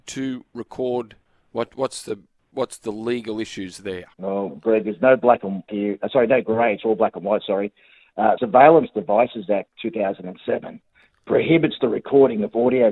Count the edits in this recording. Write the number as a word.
four